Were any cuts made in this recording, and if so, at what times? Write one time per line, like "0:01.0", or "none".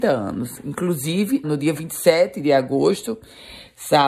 0:01.4